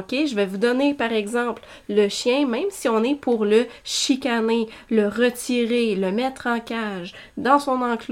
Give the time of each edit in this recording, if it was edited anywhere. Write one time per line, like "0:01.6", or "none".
none